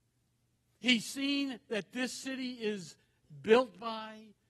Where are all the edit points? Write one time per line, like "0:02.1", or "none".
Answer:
none